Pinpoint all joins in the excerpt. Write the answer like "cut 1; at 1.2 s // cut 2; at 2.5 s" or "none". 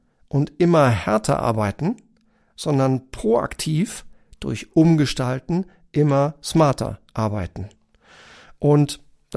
none